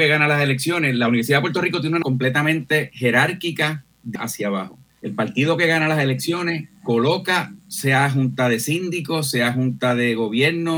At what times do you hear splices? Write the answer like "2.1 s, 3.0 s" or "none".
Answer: 2.0 s, 4.2 s, 4.9 s, 7.6 s